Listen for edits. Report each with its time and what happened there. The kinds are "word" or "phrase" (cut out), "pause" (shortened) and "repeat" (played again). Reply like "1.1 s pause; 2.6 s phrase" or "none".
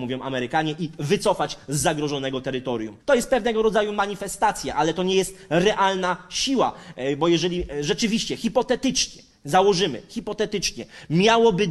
3.0 s pause